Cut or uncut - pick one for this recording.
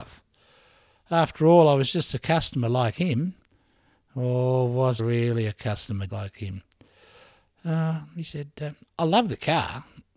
cut